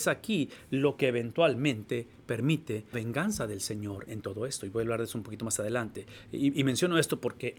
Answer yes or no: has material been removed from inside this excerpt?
yes